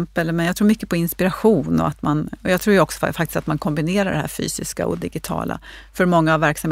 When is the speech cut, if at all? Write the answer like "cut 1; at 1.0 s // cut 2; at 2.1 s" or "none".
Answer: none